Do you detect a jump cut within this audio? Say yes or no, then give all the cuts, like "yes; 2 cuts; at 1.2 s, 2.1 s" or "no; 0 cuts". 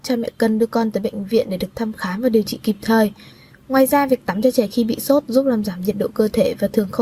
no; 0 cuts